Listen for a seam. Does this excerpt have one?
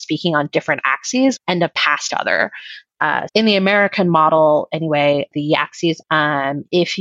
yes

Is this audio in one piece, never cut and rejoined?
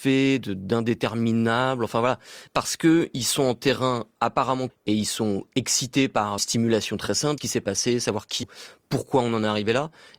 no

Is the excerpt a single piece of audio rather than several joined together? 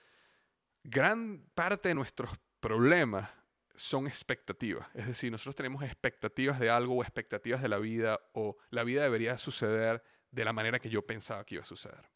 yes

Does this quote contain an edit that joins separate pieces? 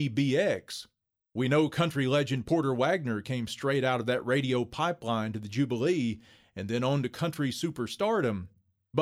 no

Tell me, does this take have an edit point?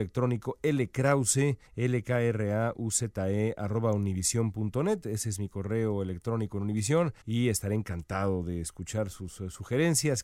yes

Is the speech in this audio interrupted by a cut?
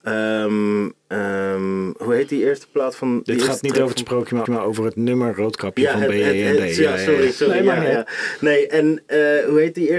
yes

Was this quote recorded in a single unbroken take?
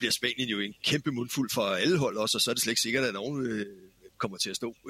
yes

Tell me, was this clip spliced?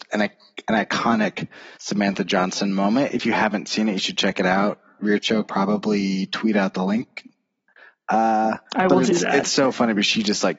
yes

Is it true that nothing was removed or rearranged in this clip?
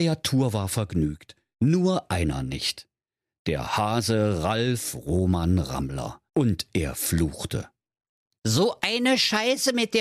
no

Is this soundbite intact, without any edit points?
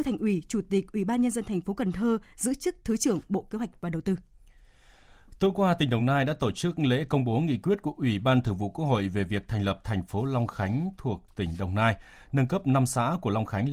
yes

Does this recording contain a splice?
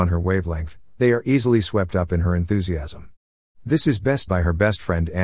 yes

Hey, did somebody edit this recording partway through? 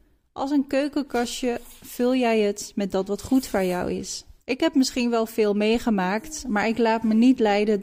yes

